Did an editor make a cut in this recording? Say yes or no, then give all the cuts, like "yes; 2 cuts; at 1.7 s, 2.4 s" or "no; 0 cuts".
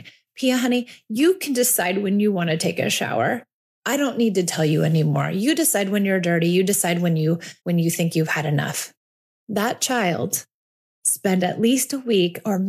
yes; 1 cut; at 7.6 s